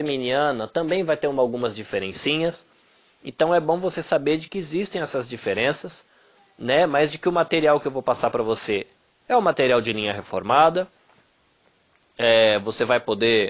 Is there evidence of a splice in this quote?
no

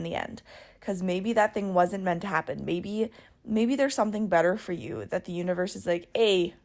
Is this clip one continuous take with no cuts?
yes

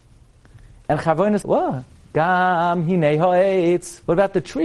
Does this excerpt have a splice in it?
yes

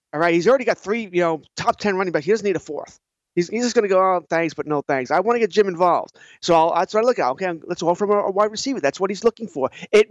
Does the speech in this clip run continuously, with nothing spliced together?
yes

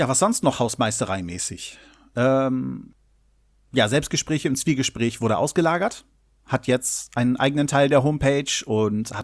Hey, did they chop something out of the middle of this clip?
no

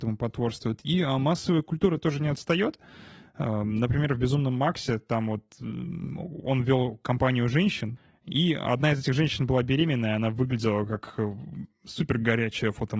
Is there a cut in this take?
no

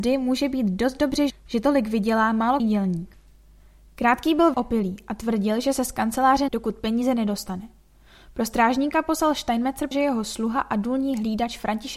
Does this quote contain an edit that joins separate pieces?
yes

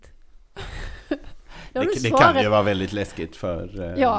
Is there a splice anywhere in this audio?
no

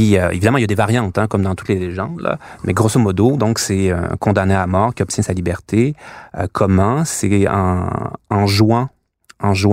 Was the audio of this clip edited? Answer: no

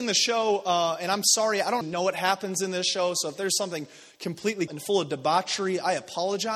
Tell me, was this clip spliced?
yes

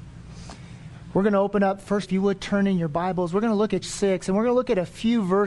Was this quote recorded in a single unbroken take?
no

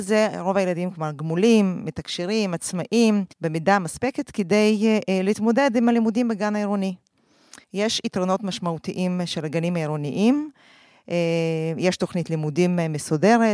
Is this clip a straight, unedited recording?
no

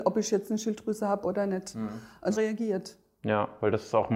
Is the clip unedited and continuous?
no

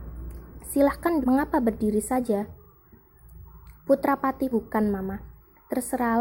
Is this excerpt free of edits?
no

